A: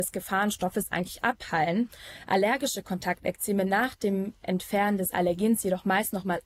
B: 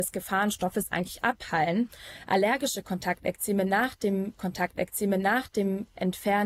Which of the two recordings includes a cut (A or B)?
B